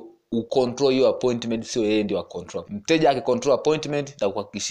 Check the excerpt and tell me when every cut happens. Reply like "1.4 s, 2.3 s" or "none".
2.6 s